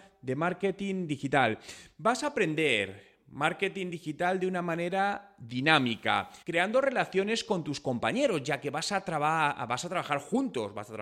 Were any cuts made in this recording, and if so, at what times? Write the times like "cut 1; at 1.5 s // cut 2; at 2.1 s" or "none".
cut 1; at 6.4 s